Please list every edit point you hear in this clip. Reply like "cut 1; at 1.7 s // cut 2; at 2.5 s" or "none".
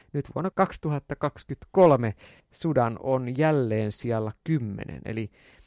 none